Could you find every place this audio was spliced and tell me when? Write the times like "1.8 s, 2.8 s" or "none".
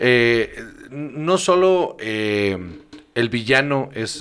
none